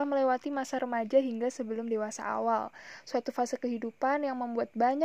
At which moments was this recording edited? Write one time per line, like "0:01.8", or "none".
none